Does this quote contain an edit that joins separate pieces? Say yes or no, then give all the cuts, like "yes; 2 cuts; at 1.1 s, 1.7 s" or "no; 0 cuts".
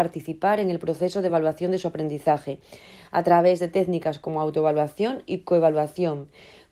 no; 0 cuts